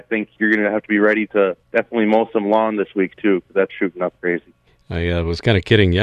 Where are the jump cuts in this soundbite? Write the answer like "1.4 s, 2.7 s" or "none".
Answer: 1.6 s, 3.7 s, 4.2 s, 4.7 s